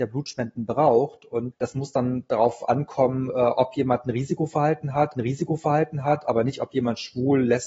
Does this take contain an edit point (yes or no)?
yes